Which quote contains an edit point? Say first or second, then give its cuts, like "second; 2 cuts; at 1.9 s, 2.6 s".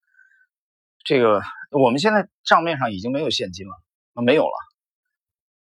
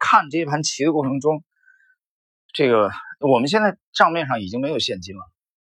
first; 1 cut; at 4.0 s